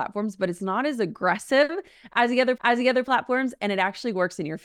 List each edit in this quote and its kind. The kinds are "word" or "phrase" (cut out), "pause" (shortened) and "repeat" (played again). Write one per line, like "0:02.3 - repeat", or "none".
0:02.6 - repeat